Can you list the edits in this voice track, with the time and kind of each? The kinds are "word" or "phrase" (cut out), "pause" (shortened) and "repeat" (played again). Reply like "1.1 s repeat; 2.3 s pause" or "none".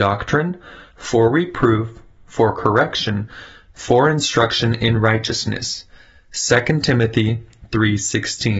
none